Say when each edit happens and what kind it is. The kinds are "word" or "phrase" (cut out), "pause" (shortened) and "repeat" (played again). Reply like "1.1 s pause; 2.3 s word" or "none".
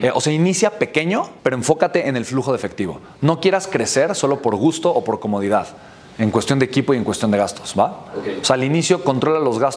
1.4 s pause